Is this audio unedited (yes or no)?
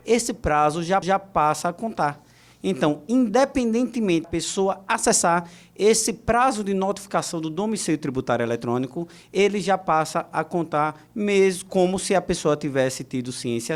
no